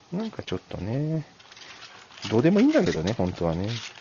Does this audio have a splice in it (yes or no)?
no